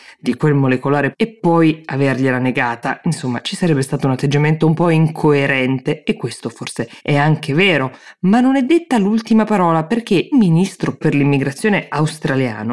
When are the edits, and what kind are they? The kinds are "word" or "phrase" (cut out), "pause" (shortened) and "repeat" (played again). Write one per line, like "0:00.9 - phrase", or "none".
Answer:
0:07.0 - pause
0:10.3 - word